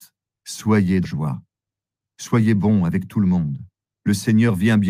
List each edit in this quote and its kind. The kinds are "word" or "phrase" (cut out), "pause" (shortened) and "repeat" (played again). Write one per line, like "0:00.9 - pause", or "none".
0:01.0 - word